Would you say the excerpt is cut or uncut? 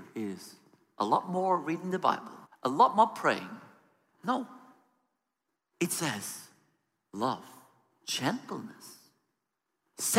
cut